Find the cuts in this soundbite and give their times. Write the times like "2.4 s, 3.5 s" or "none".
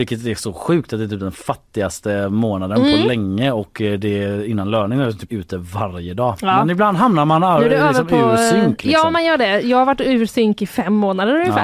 5.3 s